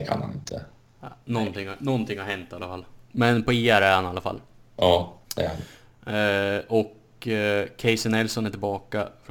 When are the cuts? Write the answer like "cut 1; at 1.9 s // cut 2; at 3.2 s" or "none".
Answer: cut 1; at 1.2 s // cut 2; at 3.0 s // cut 3; at 5.2 s